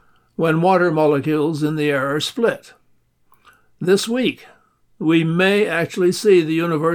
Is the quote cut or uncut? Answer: uncut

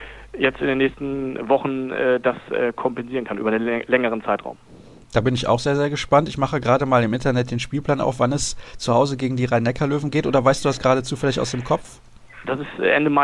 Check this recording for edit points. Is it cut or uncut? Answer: uncut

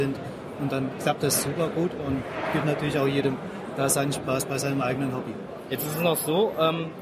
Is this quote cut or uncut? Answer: cut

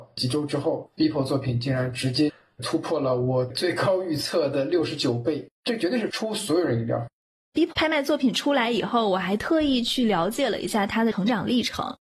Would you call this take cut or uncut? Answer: cut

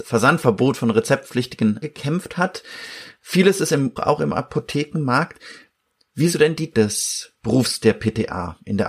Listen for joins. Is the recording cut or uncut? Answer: cut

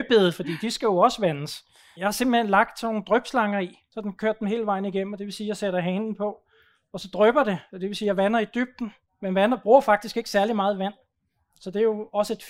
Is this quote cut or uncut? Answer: uncut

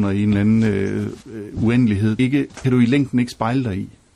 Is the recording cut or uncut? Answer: cut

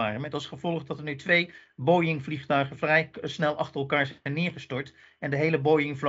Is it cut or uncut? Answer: uncut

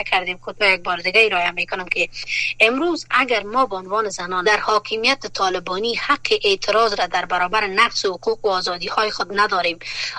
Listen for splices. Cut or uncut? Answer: cut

